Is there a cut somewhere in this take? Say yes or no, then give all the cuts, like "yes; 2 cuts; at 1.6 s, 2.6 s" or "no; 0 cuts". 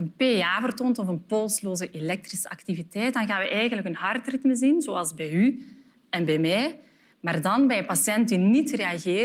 no; 0 cuts